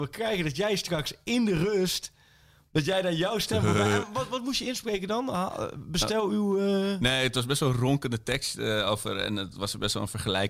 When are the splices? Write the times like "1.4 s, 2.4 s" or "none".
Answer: none